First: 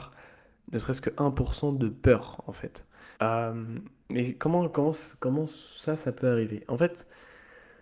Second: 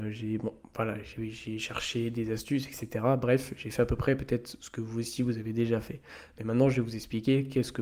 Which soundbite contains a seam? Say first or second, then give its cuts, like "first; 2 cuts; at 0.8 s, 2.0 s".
first; 1 cut; at 3.2 s